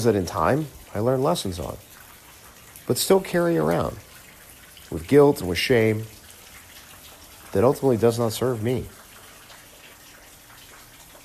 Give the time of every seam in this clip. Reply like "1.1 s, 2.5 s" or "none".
none